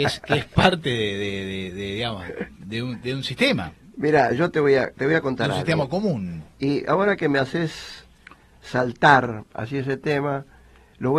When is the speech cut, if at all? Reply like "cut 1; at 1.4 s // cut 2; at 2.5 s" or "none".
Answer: none